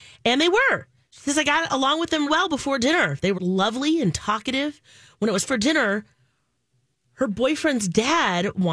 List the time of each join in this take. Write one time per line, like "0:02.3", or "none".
0:02.3
0:03.4
0:05.4